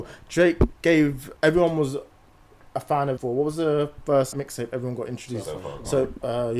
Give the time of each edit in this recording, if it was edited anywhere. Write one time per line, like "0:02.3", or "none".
0:01.4
0:03.2
0:04.3